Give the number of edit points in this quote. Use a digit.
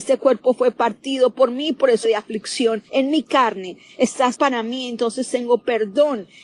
3